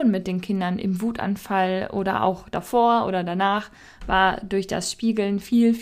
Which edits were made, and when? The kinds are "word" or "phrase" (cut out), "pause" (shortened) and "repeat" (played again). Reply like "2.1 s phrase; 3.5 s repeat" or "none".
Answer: none